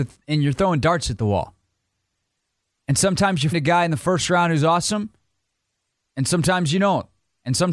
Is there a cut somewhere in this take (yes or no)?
yes